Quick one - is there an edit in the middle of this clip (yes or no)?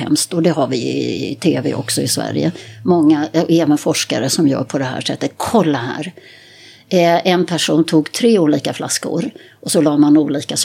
no